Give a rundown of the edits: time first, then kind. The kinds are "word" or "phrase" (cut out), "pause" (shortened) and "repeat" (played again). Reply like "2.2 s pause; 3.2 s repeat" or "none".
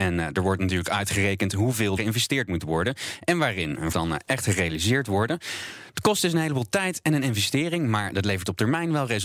2.0 s word; 3.9 s phrase